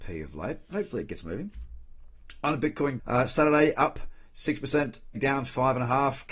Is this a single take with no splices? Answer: no; 2 cuts; at 3.0 s, 5.1 s

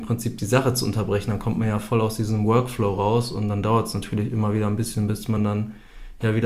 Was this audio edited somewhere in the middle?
no; 0 cuts

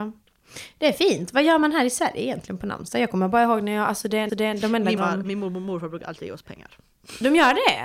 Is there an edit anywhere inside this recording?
yes; 2 cuts; at 4.3 s, 5.0 s

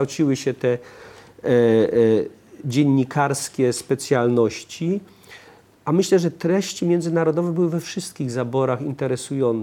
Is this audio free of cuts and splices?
yes; 0 cuts

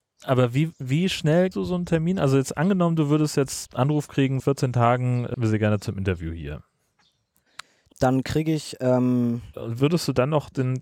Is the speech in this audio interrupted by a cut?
yes; 6 cuts; at 1.5 s, 3.7 s, 4.4 s, 5.3 s, 7.9 s, 9.5 s

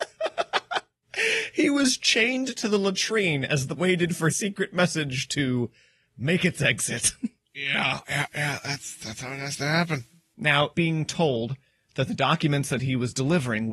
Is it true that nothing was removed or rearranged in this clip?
no; 4 cuts; at 3.8 s, 4.3 s, 8.0 s, 10.7 s

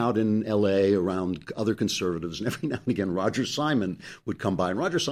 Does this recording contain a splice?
no; 0 cuts

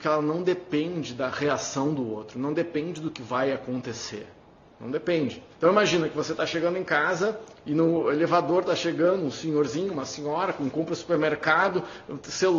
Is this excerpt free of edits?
no; 2 cuts; at 4.6 s, 5.5 s

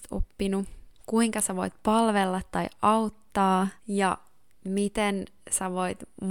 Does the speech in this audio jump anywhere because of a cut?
yes; 2 cuts; at 1.0 s, 3.8 s

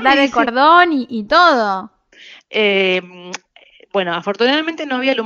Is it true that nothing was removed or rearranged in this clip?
yes; 0 cuts

